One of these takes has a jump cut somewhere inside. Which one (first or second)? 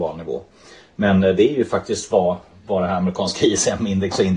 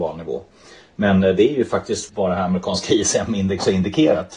second